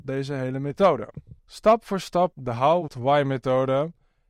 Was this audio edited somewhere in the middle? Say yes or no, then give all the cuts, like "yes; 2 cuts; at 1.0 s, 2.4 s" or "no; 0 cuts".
yes; 3 cuts; at 1.4 s, 2.3 s, 2.9 s